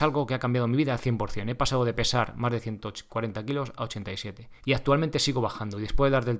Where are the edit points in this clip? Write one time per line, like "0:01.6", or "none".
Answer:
0:04.6